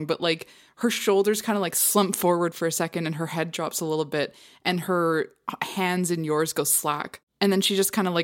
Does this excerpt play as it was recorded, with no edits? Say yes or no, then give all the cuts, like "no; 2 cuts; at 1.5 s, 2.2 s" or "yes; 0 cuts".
yes; 0 cuts